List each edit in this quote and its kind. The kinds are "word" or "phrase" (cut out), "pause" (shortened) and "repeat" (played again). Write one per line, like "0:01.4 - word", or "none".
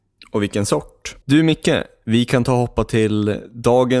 0:01.2 - pause